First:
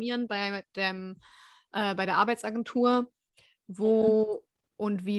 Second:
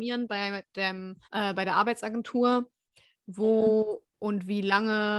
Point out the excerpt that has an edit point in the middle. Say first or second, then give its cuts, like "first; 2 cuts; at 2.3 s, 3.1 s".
second; 2 cuts; at 1.2 s, 4.1 s